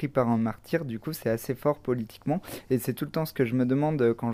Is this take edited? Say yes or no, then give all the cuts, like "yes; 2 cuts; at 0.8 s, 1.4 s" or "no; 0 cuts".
no; 0 cuts